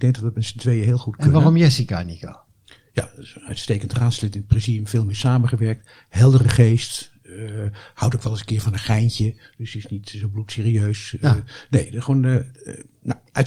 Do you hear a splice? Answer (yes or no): no